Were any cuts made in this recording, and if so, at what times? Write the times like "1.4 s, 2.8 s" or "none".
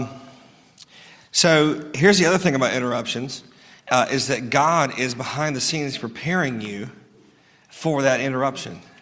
none